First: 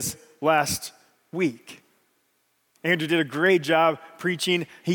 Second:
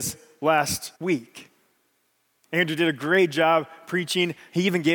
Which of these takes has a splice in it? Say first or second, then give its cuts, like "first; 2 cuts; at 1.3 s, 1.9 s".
second; 1 cut; at 1.0 s